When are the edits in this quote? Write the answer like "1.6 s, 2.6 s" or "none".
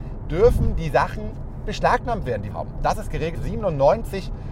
1.6 s, 2.5 s, 3.3 s